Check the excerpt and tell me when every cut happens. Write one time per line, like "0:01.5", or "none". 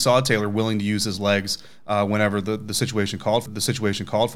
0:03.5